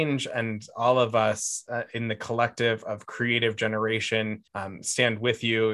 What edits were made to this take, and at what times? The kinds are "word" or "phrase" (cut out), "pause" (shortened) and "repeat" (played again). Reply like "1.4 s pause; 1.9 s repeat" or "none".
4.5 s pause